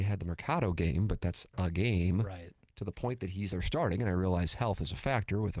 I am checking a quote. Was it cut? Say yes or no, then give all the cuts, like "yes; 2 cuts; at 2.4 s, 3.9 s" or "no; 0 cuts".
yes; 1 cut; at 3.5 s